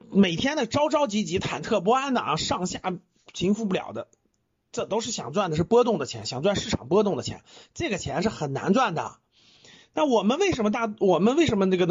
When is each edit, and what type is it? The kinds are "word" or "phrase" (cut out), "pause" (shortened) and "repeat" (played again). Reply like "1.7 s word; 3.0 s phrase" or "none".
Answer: none